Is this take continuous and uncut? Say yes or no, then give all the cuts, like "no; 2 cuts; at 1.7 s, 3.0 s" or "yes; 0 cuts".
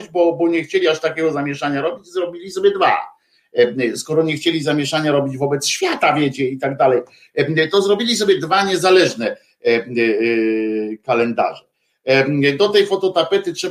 yes; 0 cuts